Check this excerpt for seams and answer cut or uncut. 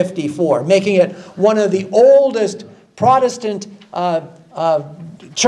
uncut